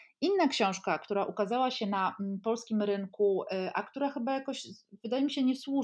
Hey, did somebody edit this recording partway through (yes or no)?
no